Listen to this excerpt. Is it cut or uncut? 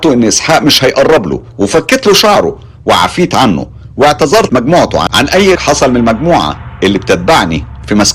cut